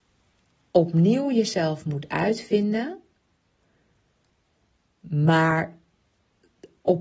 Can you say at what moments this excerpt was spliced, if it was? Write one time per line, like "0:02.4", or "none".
none